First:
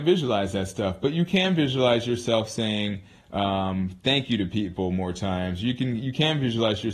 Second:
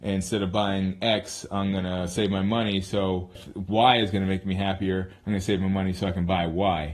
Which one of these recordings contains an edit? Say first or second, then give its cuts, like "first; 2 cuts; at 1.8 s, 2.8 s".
second; 1 cut; at 3.4 s